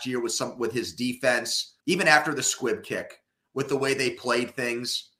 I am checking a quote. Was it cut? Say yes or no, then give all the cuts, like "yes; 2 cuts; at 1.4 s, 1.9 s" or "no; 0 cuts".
yes; 1 cut; at 1.8 s